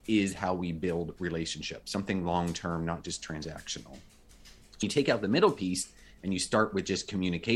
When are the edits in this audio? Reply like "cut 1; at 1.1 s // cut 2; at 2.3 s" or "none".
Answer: cut 1; at 4.8 s